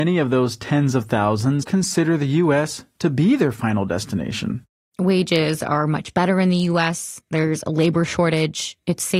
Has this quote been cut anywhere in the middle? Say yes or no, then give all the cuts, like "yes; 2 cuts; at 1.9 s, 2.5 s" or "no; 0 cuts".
yes; 1 cut; at 1.6 s